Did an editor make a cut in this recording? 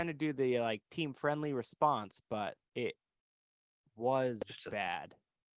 yes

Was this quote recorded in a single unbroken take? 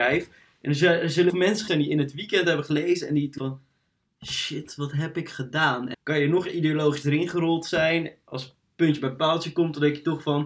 no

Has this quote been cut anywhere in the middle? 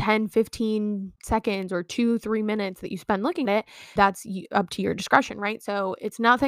yes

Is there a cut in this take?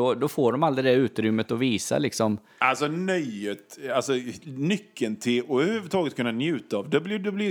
no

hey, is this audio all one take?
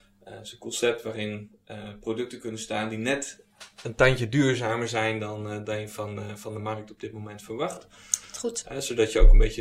yes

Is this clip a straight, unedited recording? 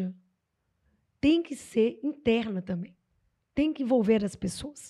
yes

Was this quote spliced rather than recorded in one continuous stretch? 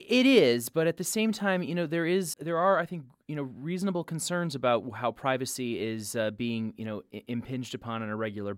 yes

